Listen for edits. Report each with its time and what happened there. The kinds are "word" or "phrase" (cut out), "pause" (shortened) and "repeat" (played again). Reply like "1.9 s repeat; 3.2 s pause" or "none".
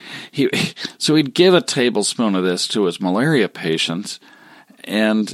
none